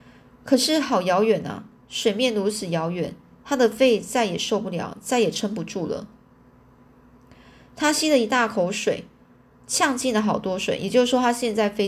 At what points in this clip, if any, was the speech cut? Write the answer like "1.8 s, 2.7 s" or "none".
none

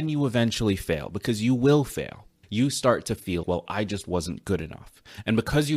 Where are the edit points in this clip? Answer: 3.4 s

